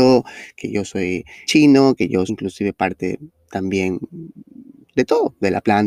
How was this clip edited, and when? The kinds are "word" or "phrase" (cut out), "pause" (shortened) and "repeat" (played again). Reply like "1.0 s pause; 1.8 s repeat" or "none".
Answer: 1.4 s word; 2.3 s word

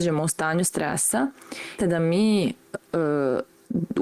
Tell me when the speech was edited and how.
1.8 s word

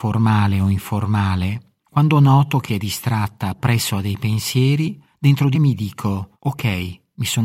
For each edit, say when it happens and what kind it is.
1.8 s pause; 2.7 s phrase; 5.1 s pause; 5.5 s word; 6.3 s pause

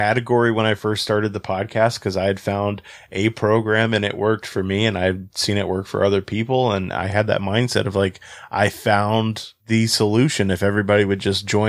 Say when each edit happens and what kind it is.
9.6 s pause

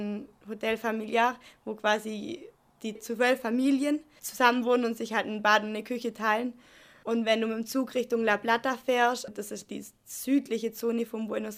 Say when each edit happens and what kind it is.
9.3 s word

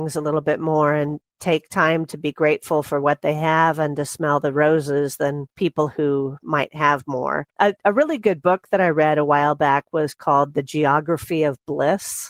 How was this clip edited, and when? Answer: 5.5 s pause; 7.5 s pause

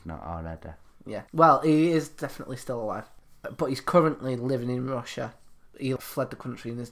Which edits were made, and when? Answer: 1.3 s pause

